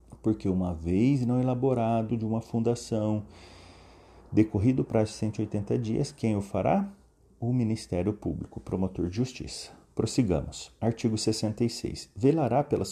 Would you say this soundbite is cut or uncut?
cut